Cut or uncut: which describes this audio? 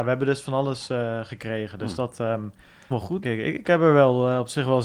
cut